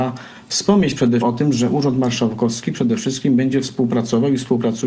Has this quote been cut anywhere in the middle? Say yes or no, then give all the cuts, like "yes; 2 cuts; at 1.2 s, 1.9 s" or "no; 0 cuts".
yes; 1 cut; at 1.2 s